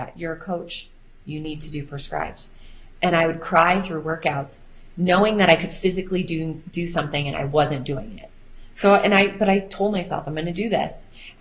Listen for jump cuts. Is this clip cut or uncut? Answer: uncut